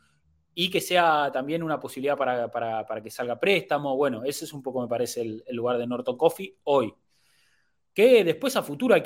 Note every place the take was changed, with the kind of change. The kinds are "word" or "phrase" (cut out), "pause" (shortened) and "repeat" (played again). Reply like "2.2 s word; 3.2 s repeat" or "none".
none

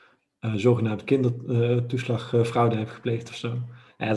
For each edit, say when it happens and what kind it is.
none

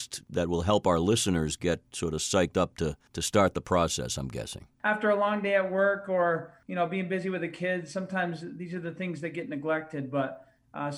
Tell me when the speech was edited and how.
4.7 s pause

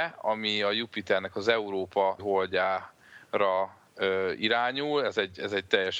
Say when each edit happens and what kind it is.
2.2 s word

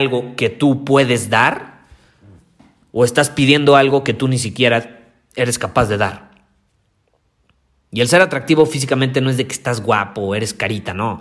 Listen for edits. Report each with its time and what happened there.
none

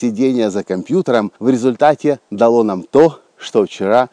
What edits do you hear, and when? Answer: 1.4 s pause

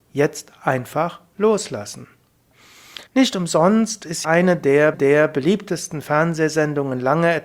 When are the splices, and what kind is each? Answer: 3.1 s pause; 4.2 s word; 4.9 s repeat

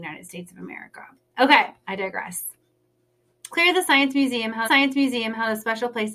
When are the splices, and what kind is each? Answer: 3.5 s phrase; 4.6 s repeat

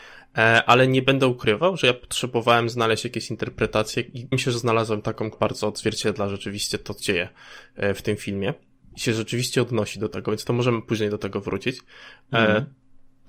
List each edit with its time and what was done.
4.3 s word; 5.3 s word; 7.0 s word

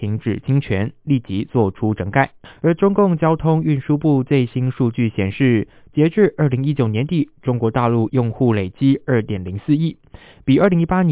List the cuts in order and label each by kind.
2.4 s pause; 8.1 s word

